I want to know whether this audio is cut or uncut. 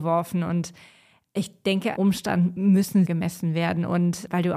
cut